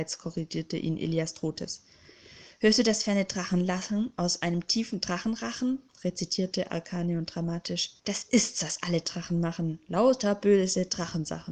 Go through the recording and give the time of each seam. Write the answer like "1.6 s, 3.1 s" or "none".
8.0 s